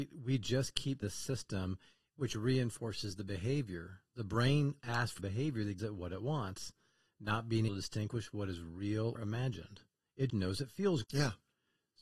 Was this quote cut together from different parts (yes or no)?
yes